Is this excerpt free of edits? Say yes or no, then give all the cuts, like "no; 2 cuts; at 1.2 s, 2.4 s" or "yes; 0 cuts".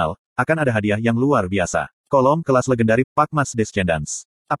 no; 2 cuts; at 2.0 s, 3.0 s